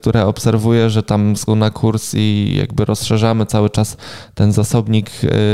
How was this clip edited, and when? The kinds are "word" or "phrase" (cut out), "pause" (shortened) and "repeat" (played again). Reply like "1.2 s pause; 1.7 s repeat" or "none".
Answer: 1.5 s word